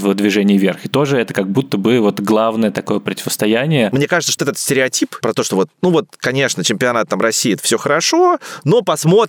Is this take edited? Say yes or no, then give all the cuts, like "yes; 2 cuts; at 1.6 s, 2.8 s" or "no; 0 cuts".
yes; 2 cuts; at 4.4 s, 5.2 s